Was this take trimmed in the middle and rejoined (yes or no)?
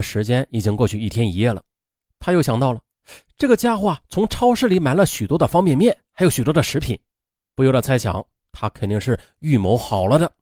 no